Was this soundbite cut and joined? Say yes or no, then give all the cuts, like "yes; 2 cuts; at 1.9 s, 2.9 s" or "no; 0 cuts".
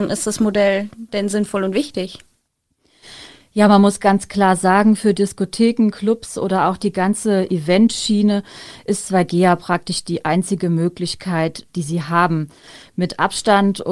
no; 0 cuts